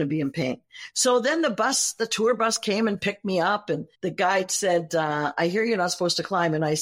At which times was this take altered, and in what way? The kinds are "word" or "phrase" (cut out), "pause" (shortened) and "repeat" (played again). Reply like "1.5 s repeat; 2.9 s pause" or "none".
3.9 s pause

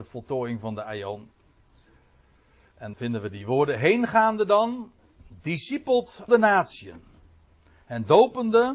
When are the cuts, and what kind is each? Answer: 2.9 s word; 6.3 s word

